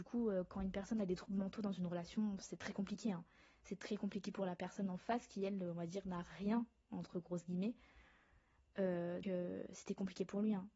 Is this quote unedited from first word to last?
no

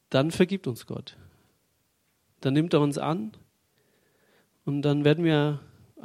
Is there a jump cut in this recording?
no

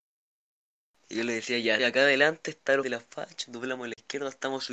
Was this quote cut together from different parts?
yes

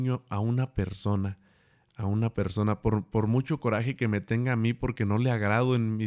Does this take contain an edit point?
no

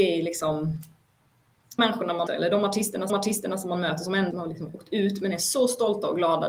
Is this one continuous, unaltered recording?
no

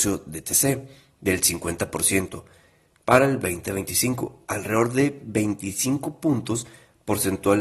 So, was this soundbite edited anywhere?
no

